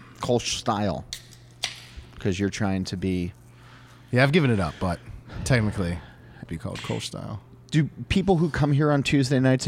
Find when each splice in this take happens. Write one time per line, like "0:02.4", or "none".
0:06.5